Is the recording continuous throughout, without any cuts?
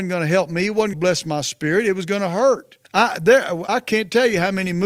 no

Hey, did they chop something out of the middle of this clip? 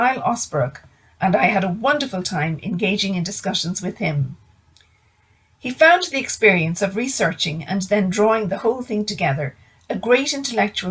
no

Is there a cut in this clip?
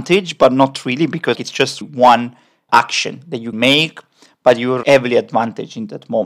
yes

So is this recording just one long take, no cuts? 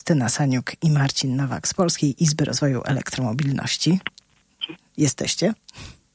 yes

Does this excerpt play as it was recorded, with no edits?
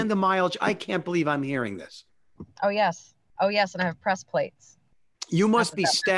yes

